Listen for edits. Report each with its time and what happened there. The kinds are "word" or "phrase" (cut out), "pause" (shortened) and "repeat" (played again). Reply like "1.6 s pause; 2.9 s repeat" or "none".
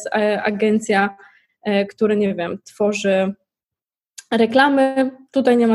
none